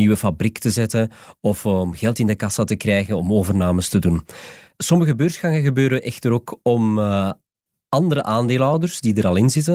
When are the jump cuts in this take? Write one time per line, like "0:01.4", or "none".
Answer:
none